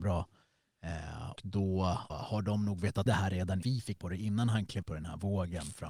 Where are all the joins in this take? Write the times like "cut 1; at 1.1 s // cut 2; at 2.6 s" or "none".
cut 1; at 1.4 s // cut 2; at 2.1 s // cut 3; at 3.1 s // cut 4; at 3.6 s // cut 5; at 4.0 s // cut 6; at 4.8 s